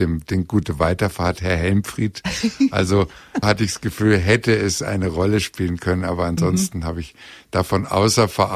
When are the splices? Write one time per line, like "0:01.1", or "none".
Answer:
0:03.4